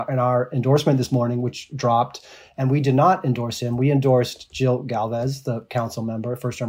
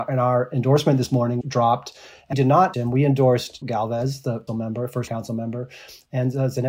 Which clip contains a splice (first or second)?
second